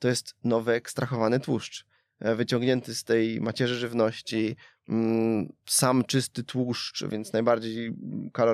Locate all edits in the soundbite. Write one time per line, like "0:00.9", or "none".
none